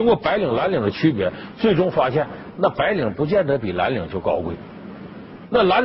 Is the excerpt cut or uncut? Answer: uncut